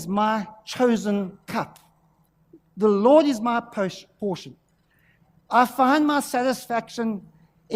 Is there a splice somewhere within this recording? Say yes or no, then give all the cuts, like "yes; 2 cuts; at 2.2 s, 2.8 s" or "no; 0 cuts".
no; 0 cuts